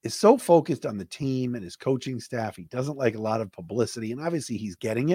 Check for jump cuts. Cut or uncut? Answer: uncut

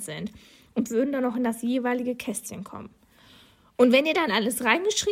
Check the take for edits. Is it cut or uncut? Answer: uncut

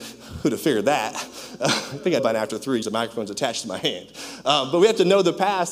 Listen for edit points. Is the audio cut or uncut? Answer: cut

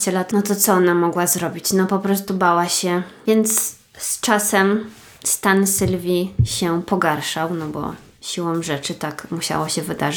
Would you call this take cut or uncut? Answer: uncut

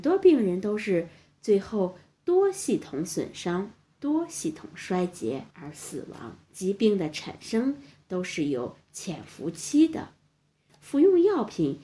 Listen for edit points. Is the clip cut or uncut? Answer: cut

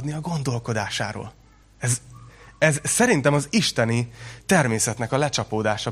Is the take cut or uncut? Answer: uncut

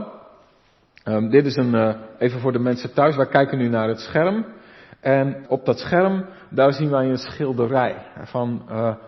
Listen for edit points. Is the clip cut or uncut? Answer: cut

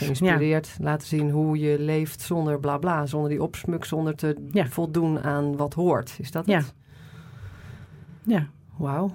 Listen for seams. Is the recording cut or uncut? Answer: uncut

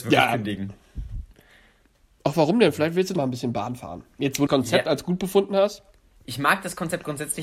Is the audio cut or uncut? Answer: cut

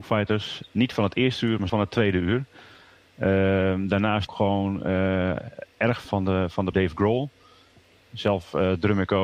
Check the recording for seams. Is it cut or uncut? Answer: cut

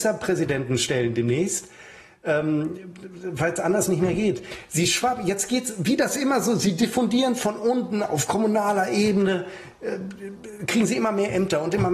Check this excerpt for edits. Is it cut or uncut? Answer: uncut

